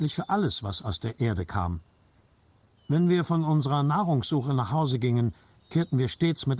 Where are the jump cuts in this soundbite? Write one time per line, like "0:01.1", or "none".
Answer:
none